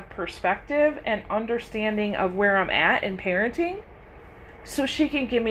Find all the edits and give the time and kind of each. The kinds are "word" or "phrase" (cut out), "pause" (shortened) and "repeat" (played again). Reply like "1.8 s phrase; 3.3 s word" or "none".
none